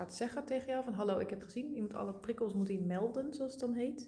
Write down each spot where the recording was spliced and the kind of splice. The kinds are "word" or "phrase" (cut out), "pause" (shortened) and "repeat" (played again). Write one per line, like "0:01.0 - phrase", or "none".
0:01.4 - word